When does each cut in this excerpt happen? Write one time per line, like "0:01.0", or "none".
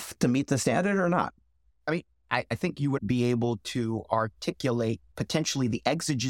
0:03.0